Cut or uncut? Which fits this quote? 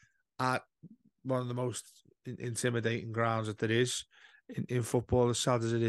uncut